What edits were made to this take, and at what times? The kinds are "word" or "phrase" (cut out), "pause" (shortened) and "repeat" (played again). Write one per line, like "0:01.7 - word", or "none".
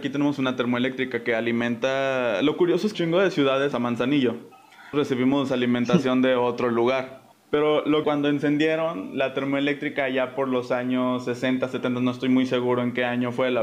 0:02.9 - phrase
0:03.7 - word
0:04.9 - word
0:07.3 - pause
0:08.0 - phrase